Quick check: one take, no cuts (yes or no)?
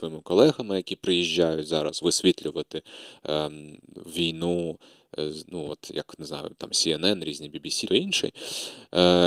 no